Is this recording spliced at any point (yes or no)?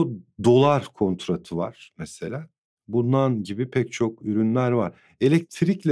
no